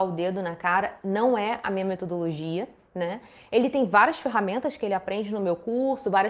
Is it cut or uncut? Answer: uncut